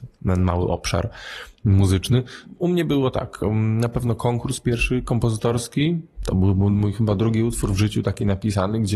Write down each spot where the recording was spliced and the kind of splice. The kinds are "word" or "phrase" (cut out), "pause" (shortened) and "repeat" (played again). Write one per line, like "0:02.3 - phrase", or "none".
none